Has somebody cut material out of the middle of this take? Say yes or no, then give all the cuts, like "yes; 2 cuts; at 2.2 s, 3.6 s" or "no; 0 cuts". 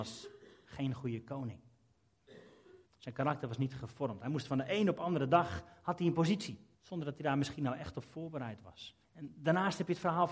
yes; 3 cuts; at 2.8 s, 6.7 s, 9.0 s